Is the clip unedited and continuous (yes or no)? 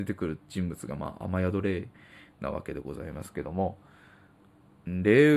yes